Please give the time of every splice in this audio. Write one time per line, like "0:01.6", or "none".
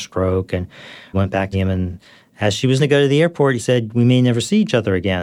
0:01.1
0:01.5
0:02.8
0:03.6